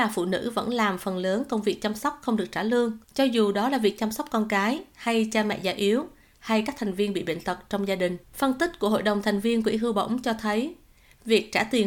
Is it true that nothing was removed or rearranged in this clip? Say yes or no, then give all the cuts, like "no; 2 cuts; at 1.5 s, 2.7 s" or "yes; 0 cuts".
no; 2 cuts; at 3.0 s, 8.2 s